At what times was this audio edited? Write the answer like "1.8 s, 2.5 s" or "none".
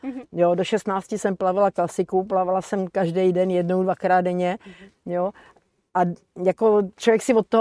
none